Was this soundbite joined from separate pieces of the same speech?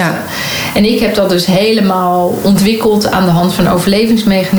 no; 0 cuts

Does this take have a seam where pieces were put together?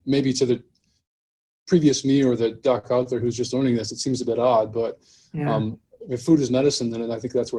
no; 0 cuts

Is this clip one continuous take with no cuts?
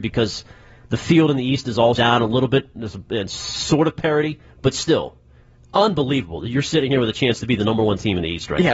no; 1 cut; at 2.0 s

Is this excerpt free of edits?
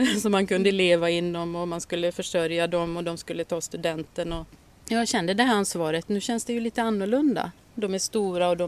yes; 0 cuts

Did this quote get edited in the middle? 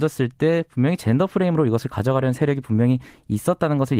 no; 0 cuts

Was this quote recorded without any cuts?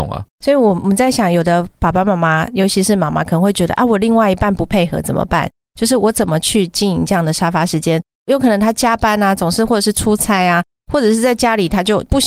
yes; 0 cuts

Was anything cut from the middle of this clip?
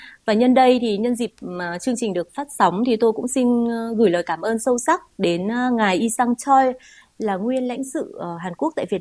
no; 0 cuts

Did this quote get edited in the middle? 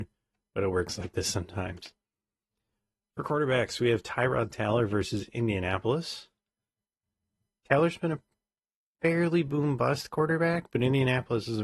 no; 0 cuts

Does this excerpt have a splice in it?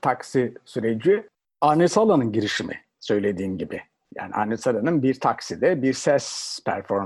no; 0 cuts

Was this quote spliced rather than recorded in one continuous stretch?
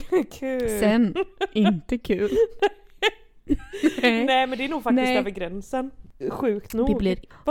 no; 0 cuts

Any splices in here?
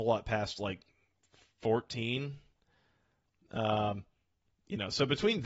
no; 0 cuts

